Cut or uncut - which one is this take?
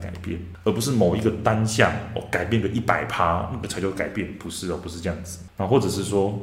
uncut